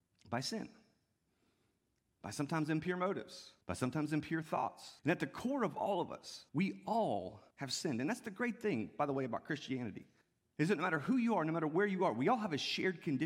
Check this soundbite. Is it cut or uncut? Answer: cut